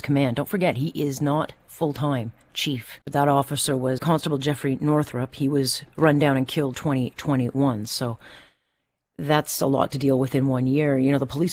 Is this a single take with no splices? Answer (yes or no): no